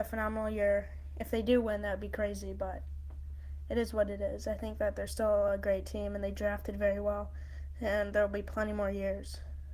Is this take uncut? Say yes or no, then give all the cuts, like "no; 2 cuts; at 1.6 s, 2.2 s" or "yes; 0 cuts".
yes; 0 cuts